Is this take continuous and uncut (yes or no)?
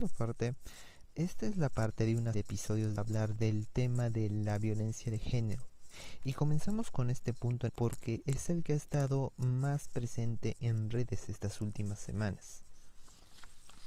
no